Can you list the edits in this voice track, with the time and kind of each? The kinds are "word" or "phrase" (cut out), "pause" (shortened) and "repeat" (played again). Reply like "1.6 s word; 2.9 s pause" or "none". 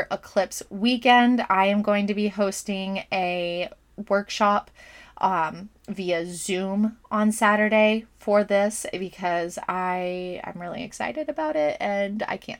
none